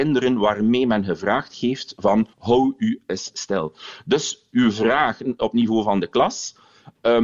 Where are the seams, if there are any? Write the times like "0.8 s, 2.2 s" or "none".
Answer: 2.3 s